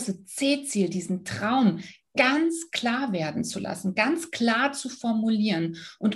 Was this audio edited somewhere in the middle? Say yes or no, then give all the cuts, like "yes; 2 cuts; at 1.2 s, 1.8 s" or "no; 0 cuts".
no; 0 cuts